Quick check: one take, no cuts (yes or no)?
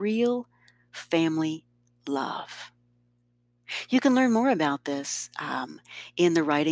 yes